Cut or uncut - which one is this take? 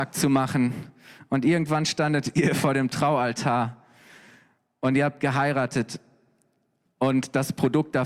uncut